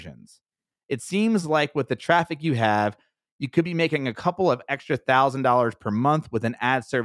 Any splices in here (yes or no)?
no